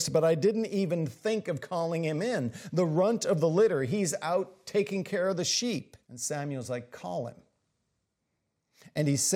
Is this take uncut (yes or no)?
no